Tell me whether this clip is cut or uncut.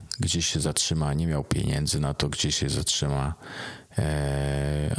uncut